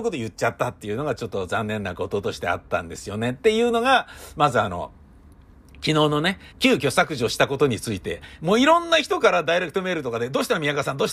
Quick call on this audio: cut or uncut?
cut